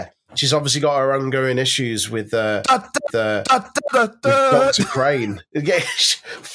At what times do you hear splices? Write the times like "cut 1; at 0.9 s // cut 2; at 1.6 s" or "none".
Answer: cut 1; at 3.1 s